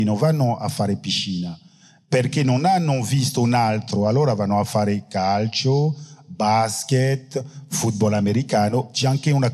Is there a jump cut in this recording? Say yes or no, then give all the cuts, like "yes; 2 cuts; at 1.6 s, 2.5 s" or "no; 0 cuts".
no; 0 cuts